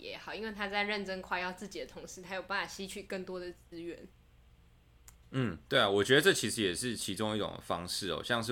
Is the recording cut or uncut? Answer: uncut